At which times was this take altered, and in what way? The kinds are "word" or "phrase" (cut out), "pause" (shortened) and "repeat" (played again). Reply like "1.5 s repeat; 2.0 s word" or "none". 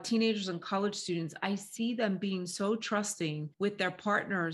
3.5 s pause